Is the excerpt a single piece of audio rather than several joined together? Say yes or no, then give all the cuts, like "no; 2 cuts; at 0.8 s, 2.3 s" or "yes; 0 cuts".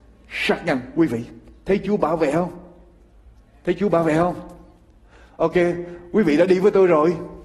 yes; 0 cuts